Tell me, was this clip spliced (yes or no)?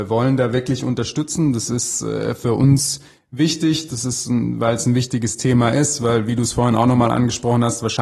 no